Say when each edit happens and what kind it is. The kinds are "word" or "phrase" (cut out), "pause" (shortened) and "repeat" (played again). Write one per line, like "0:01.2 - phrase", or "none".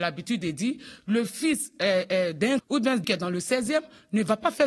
0:02.6 - word
0:03.0 - word